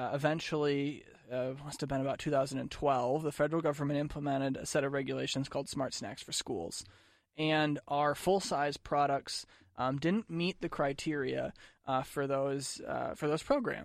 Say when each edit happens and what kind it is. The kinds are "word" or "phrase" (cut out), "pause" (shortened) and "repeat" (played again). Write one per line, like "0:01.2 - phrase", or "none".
0:10.3 - word